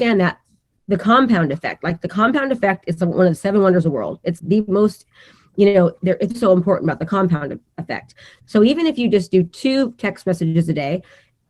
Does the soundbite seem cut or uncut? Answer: cut